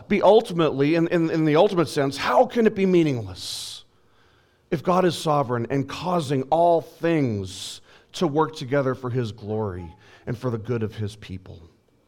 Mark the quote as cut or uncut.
uncut